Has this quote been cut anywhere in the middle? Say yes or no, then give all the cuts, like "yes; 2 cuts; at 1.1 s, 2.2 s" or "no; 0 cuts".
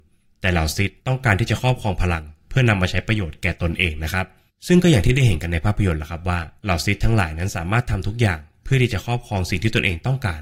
yes; 3 cuts; at 1.0 s, 4.5 s, 6.6 s